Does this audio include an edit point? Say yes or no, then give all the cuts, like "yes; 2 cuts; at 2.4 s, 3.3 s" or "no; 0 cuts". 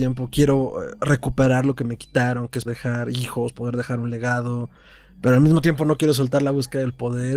yes; 1 cut; at 2.6 s